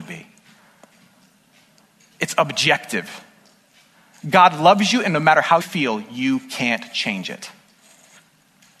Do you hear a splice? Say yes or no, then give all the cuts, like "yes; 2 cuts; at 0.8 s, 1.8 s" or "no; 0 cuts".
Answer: yes; 1 cut; at 5.6 s